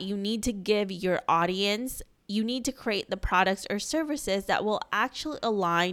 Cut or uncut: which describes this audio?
uncut